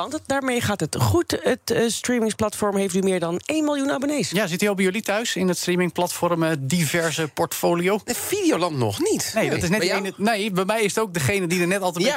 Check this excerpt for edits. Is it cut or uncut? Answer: uncut